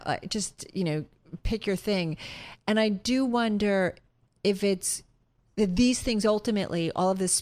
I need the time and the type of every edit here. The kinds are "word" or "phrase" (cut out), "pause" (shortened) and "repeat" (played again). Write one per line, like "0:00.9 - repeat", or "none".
none

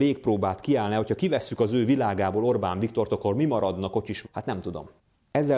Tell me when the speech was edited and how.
0:04.2 - word

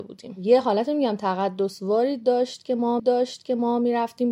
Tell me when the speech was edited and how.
0:03.0 - repeat

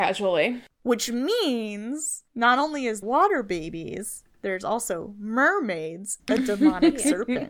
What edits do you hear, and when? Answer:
0:02.3 - pause
0:03.0 - word
0:06.2 - word

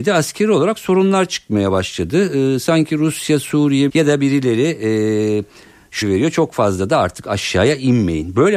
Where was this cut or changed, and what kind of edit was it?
0:03.9 - phrase
0:06.0 - word

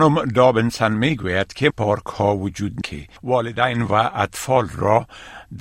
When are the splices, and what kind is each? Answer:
0:01.7 - phrase
0:02.8 - word
0:03.2 - pause

